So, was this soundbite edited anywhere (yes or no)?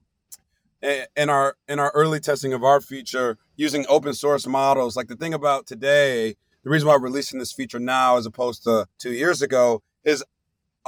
yes